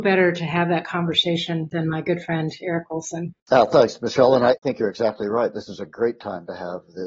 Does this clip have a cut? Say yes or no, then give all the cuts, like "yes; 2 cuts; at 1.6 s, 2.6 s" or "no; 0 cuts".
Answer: yes; 2 cuts; at 1.7 s, 3.4 s